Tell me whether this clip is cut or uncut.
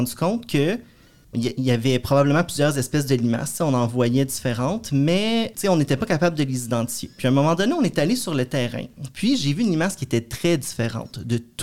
cut